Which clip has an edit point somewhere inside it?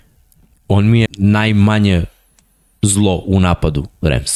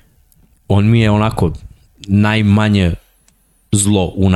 first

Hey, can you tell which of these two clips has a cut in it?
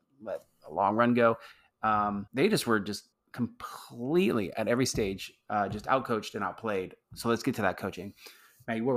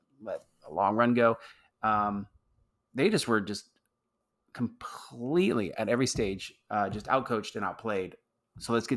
first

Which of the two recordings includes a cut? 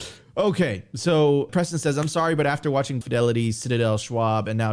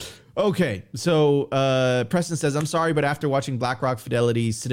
first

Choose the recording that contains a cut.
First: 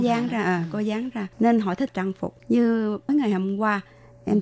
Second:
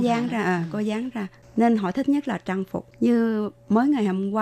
first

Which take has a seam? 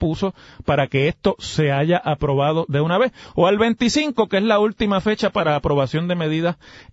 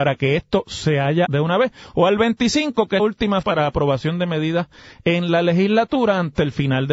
second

